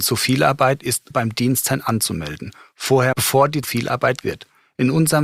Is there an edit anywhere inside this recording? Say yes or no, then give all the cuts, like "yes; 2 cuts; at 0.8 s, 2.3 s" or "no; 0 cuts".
yes; 4 cuts; at 1.1 s, 3.1 s, 3.6 s, 4.2 s